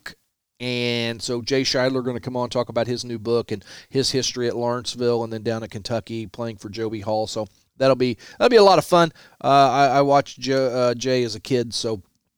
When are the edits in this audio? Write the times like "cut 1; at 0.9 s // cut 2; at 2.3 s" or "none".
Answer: none